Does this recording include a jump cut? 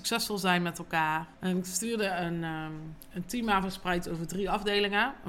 yes; 1 cut; at 1.3 s

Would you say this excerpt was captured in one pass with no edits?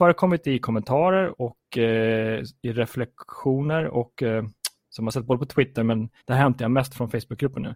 no; 1 cut; at 6.2 s

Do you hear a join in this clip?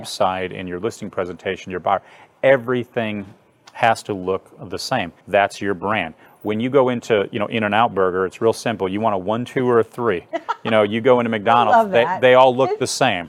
yes; 1 cut; at 5.2 s

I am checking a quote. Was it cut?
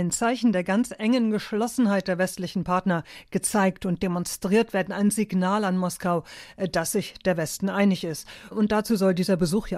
no; 0 cuts

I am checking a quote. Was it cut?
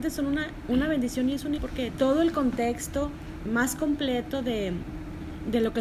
yes; 3 cuts; at 1.6 s, 2.0 s, 3.5 s

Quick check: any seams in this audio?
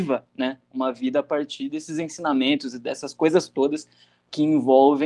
no; 0 cuts

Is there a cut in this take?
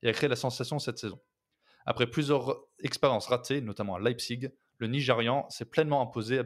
no; 0 cuts

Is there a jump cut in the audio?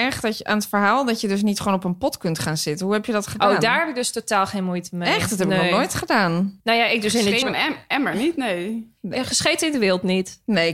yes; 2 cuts; at 7.4 s, 9.0 s

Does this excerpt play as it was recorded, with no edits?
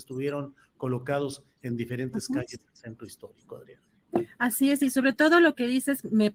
yes; 0 cuts

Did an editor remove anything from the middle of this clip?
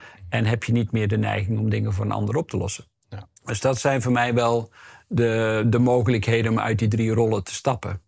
yes; 1 cut; at 3.4 s

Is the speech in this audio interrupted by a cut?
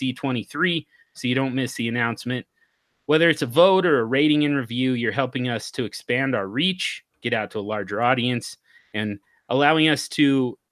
no; 0 cuts

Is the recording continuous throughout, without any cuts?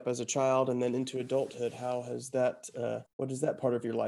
no; 1 cut; at 3.1 s

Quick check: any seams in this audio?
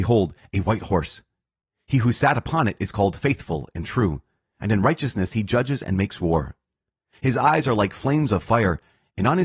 no; 0 cuts

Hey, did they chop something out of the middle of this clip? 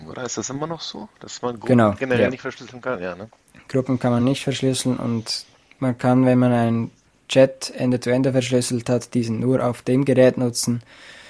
no; 0 cuts

